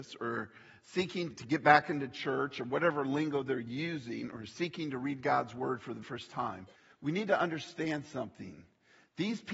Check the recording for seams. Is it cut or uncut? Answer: cut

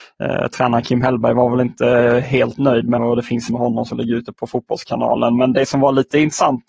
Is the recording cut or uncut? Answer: cut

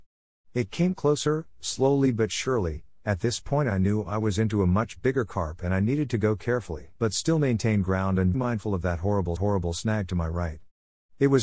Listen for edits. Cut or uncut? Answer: cut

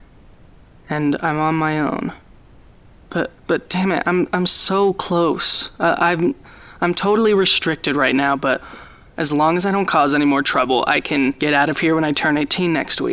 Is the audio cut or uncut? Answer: cut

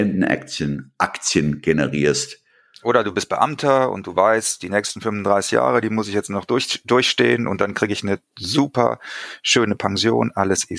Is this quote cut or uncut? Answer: uncut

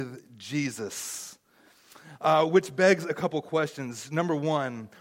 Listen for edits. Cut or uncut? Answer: uncut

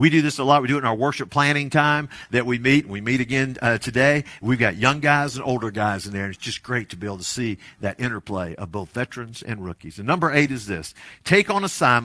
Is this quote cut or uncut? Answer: uncut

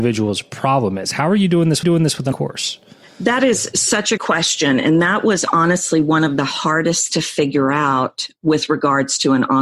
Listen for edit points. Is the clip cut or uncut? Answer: cut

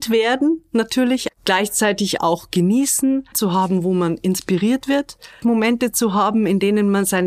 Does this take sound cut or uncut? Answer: cut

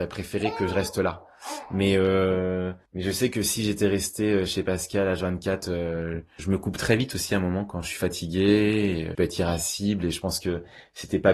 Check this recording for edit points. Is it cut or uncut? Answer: cut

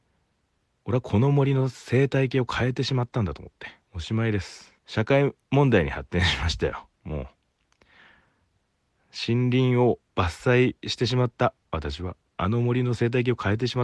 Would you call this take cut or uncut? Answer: cut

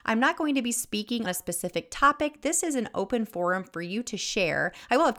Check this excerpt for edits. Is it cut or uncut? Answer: cut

